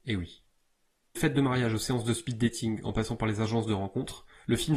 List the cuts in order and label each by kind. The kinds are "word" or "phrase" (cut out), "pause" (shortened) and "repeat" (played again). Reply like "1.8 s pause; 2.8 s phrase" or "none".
1.2 s word